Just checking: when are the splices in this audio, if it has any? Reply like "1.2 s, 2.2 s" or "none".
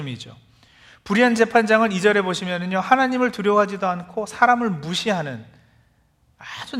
none